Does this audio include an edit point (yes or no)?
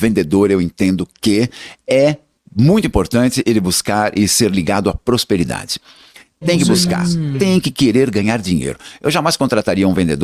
no